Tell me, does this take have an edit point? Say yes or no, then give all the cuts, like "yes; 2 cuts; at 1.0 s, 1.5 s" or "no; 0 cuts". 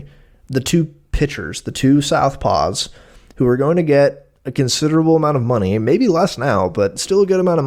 no; 0 cuts